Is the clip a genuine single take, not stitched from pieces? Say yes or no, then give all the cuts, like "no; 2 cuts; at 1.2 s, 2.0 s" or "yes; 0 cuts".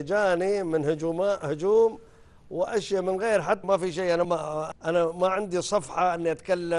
no; 3 cuts; at 3.6 s, 4.2 s, 4.7 s